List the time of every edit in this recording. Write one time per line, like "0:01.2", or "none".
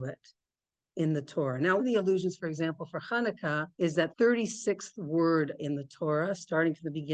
0:01.8
0:03.7
0:04.1